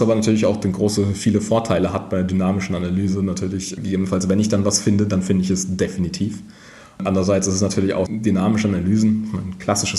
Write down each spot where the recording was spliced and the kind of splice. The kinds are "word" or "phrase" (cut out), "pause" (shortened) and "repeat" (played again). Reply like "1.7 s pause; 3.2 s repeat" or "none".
8.1 s word

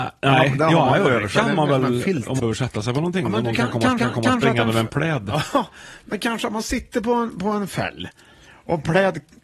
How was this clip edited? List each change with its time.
2.4 s phrase; 4.0 s repeat

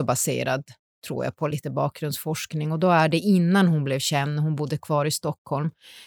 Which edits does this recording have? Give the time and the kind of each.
none

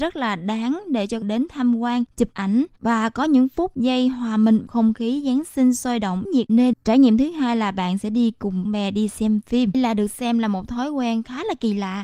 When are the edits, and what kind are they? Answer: 1.2 s word; 4.7 s word; 6.2 s word; 6.7 s word; 8.6 s word; 9.7 s word

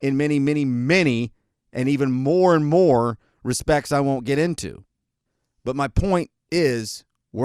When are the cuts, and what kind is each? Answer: none

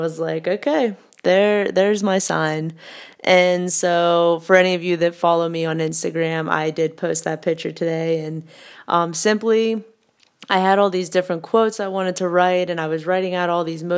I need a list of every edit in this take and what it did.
none

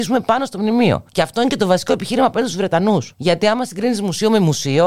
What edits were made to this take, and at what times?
1.1 s pause; 3.1 s pause

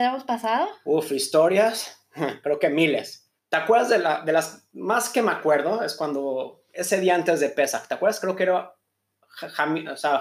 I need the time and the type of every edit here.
3.4 s pause; 6.7 s pause

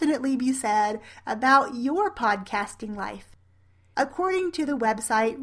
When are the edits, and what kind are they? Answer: none

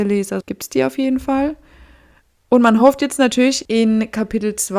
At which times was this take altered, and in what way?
none

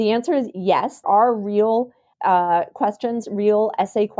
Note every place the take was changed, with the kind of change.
1.0 s word; 2.1 s word

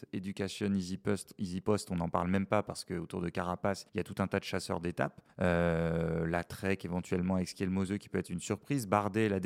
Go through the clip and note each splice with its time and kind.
3.9 s pause; 5.3 s pause

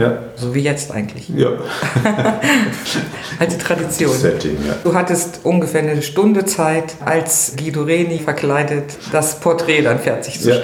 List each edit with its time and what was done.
none

